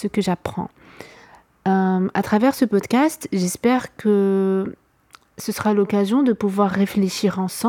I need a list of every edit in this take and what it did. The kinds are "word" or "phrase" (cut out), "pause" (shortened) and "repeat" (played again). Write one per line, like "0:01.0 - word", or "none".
none